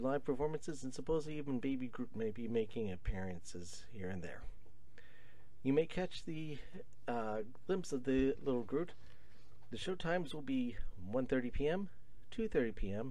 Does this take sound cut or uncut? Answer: cut